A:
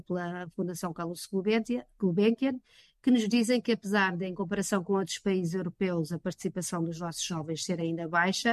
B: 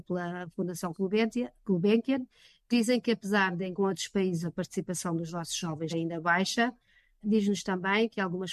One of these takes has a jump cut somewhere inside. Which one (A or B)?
B